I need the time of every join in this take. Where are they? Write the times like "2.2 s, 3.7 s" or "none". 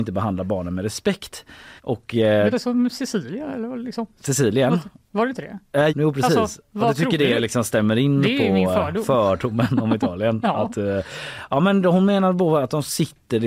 1.8 s, 2.5 s, 5.9 s